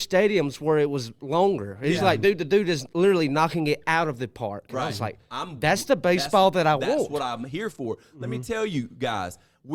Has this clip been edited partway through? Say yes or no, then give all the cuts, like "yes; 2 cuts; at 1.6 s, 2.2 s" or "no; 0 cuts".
no; 0 cuts